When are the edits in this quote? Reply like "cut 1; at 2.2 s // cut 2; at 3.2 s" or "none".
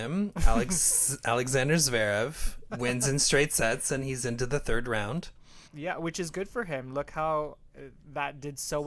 cut 1; at 2.7 s // cut 2; at 5.7 s

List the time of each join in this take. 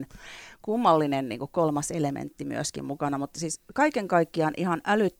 none

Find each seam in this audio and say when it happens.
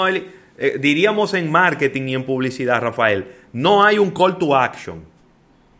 none

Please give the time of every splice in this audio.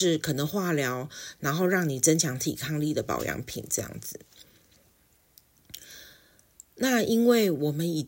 none

